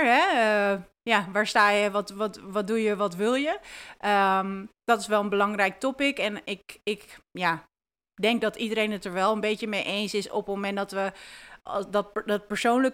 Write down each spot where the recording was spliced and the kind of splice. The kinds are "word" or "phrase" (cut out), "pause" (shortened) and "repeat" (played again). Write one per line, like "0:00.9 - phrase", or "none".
0:04.8 - pause